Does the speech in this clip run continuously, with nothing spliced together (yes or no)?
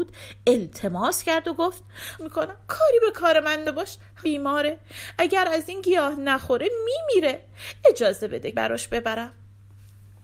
no